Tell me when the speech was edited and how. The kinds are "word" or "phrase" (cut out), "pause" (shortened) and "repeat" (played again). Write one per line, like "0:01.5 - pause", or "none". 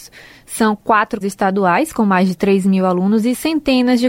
0:01.2 - word